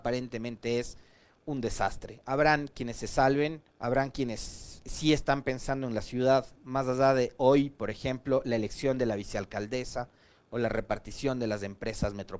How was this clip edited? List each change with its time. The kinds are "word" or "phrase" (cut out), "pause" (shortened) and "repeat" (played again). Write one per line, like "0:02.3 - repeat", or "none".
0:03.7 - pause